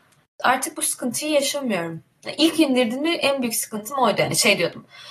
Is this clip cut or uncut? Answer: uncut